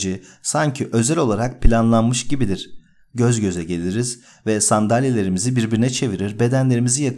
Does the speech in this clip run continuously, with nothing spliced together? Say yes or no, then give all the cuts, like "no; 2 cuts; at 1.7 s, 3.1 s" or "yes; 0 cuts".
yes; 0 cuts